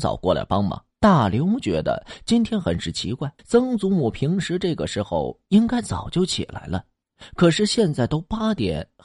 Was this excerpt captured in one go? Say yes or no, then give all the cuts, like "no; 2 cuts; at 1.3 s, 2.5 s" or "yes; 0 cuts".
no; 2 cuts; at 0.9 s, 3.4 s